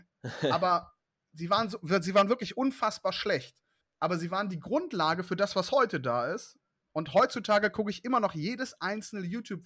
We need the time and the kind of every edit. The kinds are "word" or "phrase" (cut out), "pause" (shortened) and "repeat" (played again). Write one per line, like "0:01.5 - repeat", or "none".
0:01.0 - pause
0:03.8 - pause